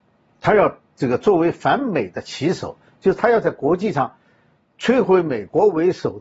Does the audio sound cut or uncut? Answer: uncut